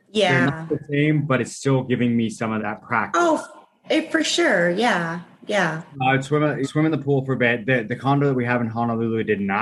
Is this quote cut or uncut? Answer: cut